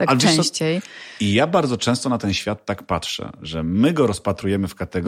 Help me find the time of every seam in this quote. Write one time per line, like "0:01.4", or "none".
none